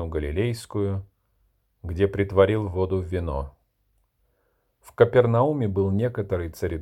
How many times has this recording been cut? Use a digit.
0